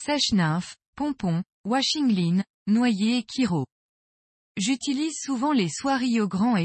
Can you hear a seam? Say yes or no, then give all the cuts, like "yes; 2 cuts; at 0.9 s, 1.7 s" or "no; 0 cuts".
no; 0 cuts